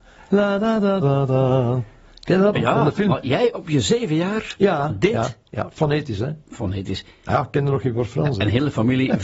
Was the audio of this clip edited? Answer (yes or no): yes